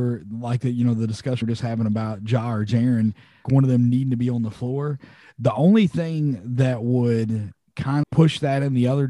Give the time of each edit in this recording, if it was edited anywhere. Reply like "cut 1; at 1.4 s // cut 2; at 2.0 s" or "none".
cut 1; at 1.4 s // cut 2; at 3.4 s // cut 3; at 8.0 s